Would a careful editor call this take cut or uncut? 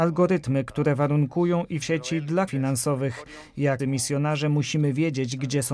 cut